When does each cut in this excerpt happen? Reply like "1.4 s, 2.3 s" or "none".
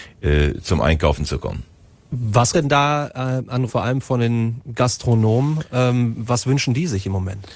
2.5 s, 3.7 s

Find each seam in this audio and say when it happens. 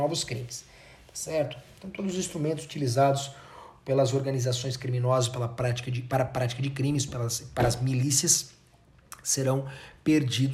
none

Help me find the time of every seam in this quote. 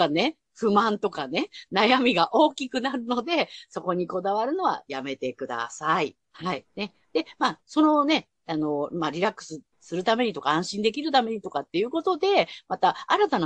6.2 s, 6.7 s

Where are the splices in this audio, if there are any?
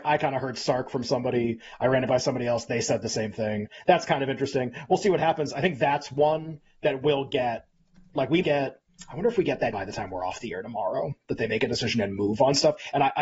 8.4 s, 9.7 s

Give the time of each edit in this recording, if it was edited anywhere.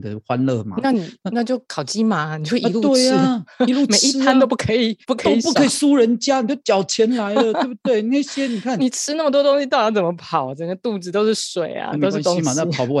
5.0 s

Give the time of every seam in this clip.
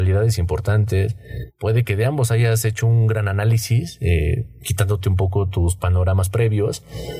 none

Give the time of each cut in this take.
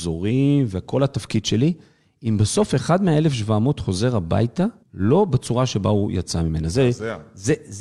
4.8 s

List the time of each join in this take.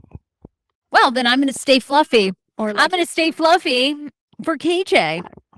none

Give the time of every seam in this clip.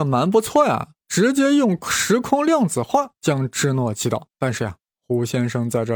1.0 s, 4.3 s

